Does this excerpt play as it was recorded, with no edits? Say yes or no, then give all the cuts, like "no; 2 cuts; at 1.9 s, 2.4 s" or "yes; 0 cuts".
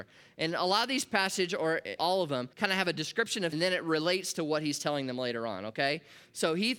no; 3 cuts; at 2.0 s, 2.5 s, 3.5 s